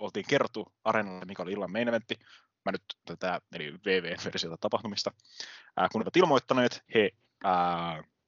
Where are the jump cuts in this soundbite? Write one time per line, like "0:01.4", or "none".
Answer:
0:01.2
0:03.0
0:03.5
0:06.0
0:06.9